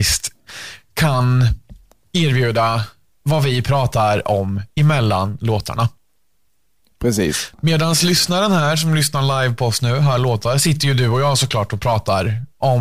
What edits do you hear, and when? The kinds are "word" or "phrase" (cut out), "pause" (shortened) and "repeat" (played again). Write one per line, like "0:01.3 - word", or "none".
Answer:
none

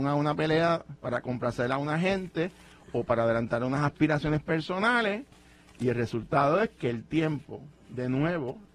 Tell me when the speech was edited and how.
none

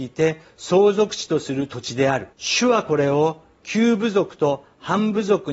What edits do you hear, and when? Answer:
0:02.3 - pause

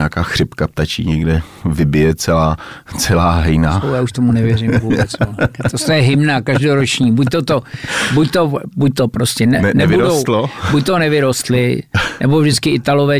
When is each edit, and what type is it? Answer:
none

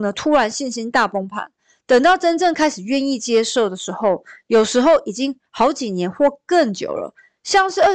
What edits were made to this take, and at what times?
none

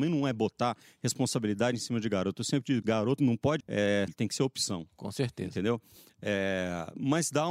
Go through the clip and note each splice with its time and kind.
0:02.8 - word
0:03.2 - word
0:03.6 - word
0:04.1 - word

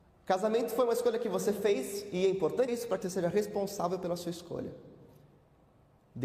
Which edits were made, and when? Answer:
0:02.7 - word
0:03.0 - word

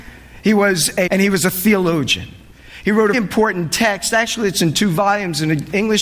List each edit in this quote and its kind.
0:01.1 - word
0:03.1 - word

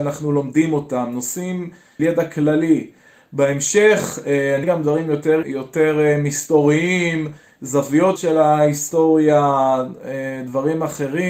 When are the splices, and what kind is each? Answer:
0:02.0 - word
0:04.6 - word
0:05.4 - word
0:08.2 - word

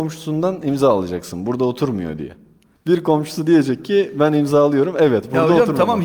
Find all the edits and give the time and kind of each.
none

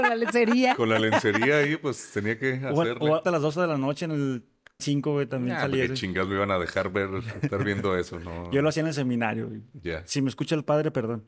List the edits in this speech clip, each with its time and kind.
0:03.2 - phrase
0:04.8 - word

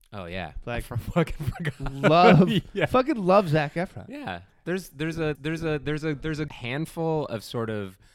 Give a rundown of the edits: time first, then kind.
0:05.3 - repeat
0:06.5 - word

